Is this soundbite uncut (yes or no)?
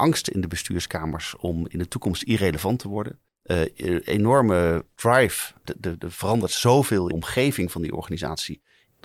no